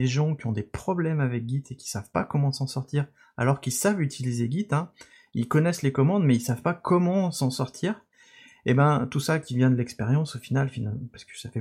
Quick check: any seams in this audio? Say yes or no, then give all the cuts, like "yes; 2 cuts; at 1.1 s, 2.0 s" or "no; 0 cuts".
no; 0 cuts